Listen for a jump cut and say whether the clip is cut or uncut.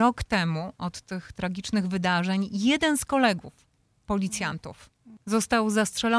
uncut